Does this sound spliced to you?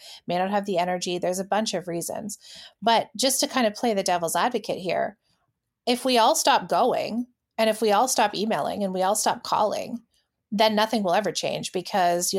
no; 0 cuts

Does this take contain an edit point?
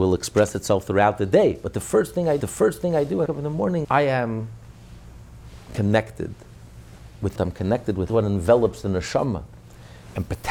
yes; 5 cuts; at 2.4 s, 3.3 s, 3.8 s, 7.4 s, 8.1 s

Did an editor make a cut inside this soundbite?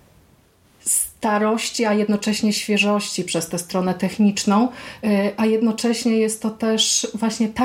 no; 0 cuts

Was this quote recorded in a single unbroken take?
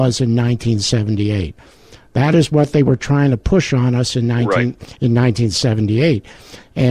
yes; 0 cuts

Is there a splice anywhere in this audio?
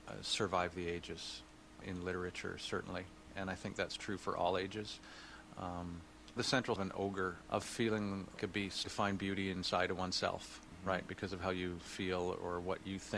yes; 6 cuts; at 1.8 s, 6.4 s, 6.8 s, 7.4 s, 8.4 s, 8.8 s

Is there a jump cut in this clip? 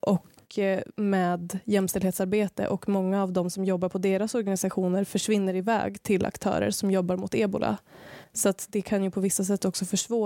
no; 0 cuts

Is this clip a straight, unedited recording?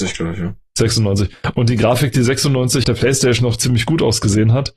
no; 2 cuts; at 2.8 s, 3.4 s

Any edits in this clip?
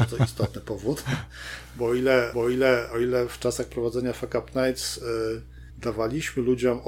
yes; 2 cuts; at 2.3 s, 5.7 s

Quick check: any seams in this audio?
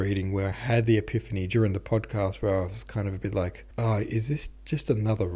yes; 1 cut; at 3.7 s

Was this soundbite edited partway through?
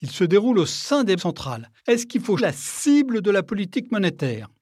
yes; 3 cuts; at 1.2 s, 1.8 s, 2.4 s

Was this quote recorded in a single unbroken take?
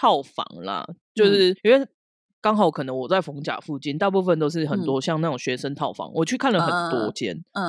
no; 1 cut; at 1.6 s

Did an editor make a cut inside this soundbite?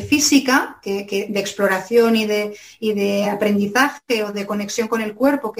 no; 0 cuts

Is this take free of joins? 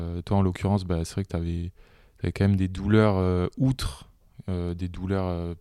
yes; 0 cuts

